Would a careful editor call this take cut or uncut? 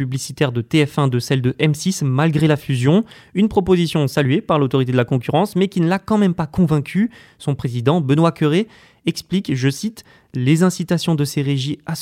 uncut